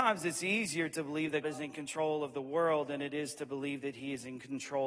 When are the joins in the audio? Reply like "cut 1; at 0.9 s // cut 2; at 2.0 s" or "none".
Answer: cut 1; at 1.4 s